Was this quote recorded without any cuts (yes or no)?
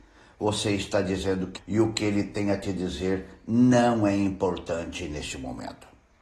no